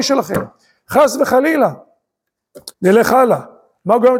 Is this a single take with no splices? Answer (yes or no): no